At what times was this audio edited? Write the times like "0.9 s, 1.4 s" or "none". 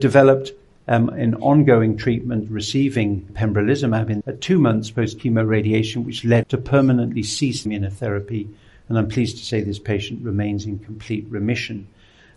3.3 s, 4.2 s, 6.4 s, 7.7 s